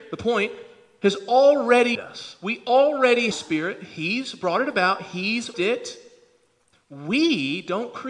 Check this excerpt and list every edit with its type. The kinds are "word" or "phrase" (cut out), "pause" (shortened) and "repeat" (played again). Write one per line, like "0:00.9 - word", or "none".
0:01.9 - word
0:03.3 - phrase
0:05.5 - word